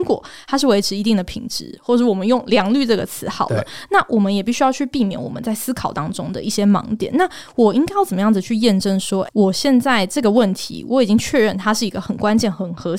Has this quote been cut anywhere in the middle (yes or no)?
yes